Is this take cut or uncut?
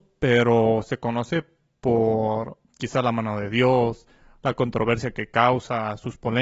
uncut